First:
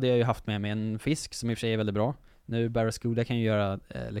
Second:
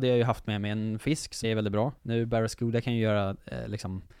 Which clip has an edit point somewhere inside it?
second; 2 cuts; at 1.4 s, 2.0 s

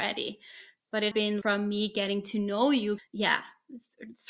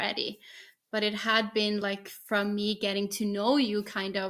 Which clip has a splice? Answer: first; 3 cuts; at 1.1 s, 1.4 s, 3.0 s

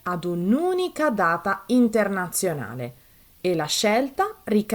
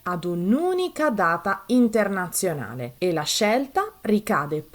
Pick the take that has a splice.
second; 1 cut; at 3.0 s

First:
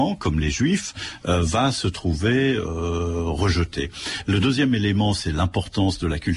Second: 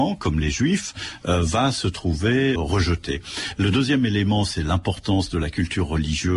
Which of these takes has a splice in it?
second; 1 cut; at 2.6 s

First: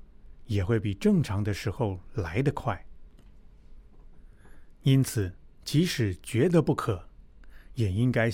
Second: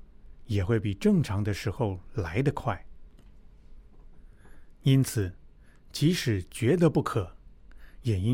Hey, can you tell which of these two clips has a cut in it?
first; 1 cut; at 5.5 s

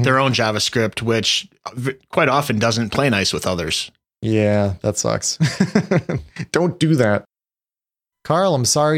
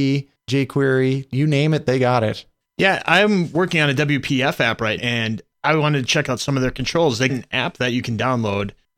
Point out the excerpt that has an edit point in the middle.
second; 3 cuts; at 2.6 s, 5.0 s, 7.3 s

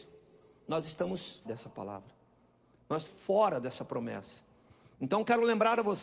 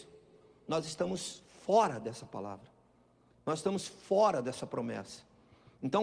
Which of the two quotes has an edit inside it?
first; 2 cuts; at 1.5 s, 3.1 s

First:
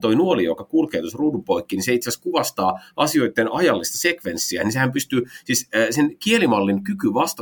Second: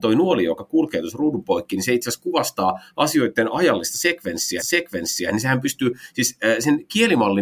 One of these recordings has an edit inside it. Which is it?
second; 1 cut; at 4.6 s

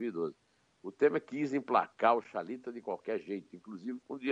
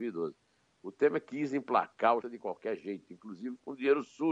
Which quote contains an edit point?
second; 1 cut; at 2.2 s

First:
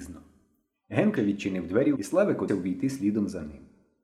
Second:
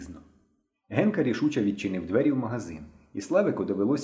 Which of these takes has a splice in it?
first; 3 cuts; at 1.2 s, 2.0 s, 2.5 s

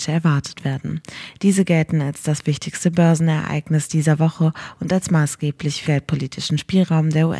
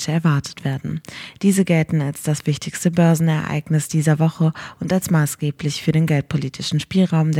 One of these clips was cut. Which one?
first; 1 cut; at 5.8 s

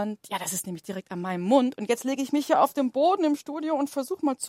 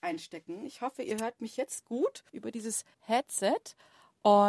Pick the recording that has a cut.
second; 2 cuts; at 2.3 s, 2.9 s

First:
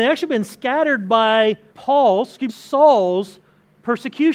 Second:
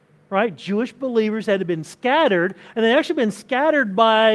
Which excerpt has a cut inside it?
first; 2 cuts; at 1.7 s, 2.5 s

